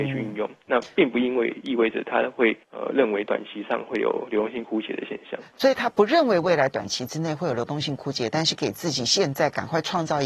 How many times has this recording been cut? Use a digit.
1